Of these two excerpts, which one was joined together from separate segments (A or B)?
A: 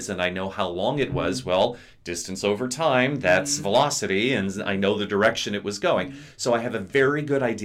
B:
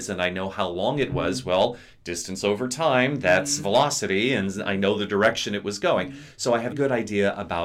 B